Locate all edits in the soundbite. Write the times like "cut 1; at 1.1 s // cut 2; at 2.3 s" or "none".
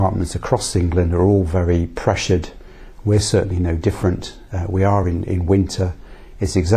none